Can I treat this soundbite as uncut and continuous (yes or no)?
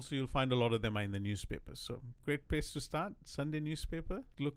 yes